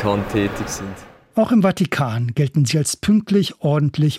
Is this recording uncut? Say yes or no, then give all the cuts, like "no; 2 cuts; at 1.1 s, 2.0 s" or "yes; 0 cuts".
yes; 0 cuts